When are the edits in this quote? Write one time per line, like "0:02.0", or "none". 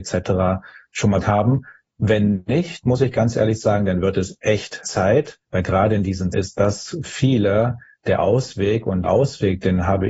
0:01.2
0:04.8
0:05.4
0:06.3
0:07.0
0:09.0